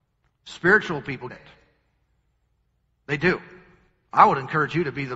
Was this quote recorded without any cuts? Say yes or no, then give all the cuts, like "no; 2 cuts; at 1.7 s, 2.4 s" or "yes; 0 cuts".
no; 1 cut; at 1.3 s